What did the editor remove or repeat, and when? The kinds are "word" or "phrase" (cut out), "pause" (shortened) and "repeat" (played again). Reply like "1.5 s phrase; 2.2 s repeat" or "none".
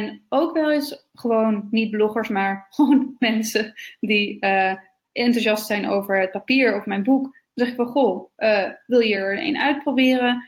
none